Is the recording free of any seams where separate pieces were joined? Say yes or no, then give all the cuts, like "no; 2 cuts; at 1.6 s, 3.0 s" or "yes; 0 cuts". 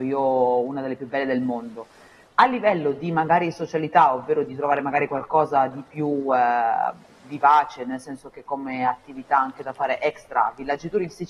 yes; 0 cuts